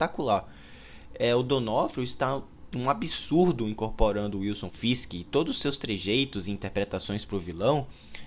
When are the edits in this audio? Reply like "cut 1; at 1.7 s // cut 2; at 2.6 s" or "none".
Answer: cut 1; at 2.7 s // cut 2; at 4.7 s